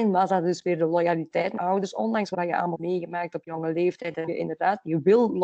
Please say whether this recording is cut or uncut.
cut